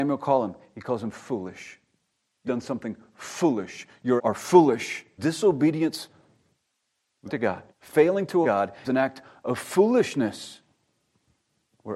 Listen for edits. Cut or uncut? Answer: cut